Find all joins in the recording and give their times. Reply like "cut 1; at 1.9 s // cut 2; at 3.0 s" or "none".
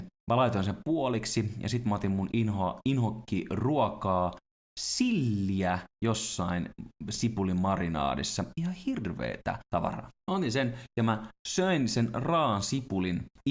cut 1; at 2.3 s